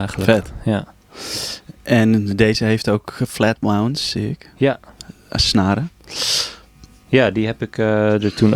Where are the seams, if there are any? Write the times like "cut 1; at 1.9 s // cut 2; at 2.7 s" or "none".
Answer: none

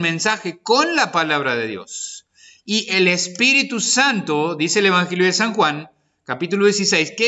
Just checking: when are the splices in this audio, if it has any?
none

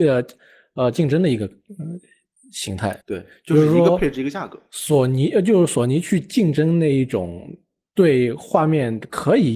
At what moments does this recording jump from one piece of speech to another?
cut 1; at 3.0 s

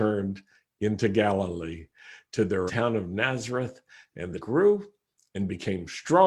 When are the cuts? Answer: cut 1; at 2.7 s // cut 2; at 4.4 s

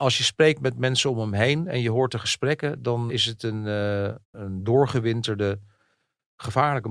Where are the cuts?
cut 1; at 3.1 s // cut 2; at 4.2 s

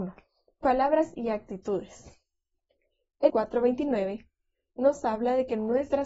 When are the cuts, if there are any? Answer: cut 1; at 3.3 s

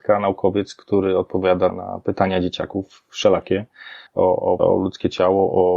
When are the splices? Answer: cut 1; at 1.7 s // cut 2; at 4.1 s // cut 3; at 4.6 s

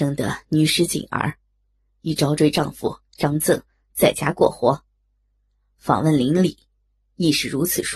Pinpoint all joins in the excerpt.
none

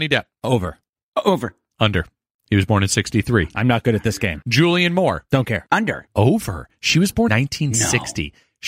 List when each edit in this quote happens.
cut 1; at 7.3 s

